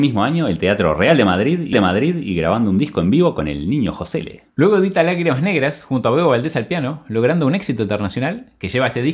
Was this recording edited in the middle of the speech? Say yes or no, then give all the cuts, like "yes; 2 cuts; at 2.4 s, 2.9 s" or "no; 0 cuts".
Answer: yes; 1 cut; at 1.7 s